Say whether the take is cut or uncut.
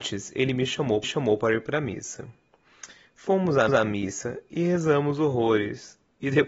cut